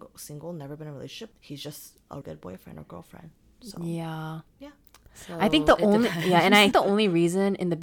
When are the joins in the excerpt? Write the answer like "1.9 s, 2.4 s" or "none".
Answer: 1.3 s, 2.2 s, 4.5 s, 6.7 s